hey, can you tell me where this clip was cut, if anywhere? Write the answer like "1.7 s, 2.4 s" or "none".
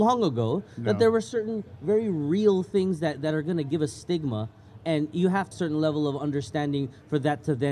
5.5 s